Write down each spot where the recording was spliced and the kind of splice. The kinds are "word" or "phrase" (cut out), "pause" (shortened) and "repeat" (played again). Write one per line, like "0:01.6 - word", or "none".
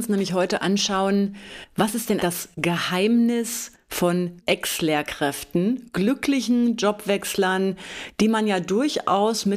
0:02.2 - word
0:04.4 - word